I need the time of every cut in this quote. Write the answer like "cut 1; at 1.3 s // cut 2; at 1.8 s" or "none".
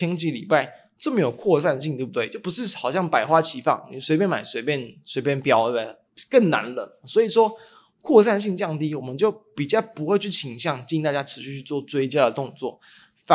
none